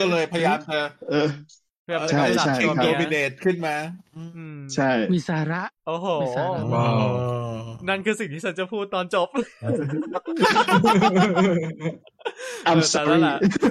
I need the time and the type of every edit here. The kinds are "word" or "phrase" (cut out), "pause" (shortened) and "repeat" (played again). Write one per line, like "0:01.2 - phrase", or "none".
0:05.8 - pause